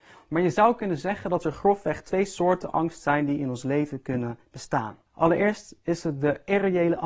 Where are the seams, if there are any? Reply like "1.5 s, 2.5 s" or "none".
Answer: 5.1 s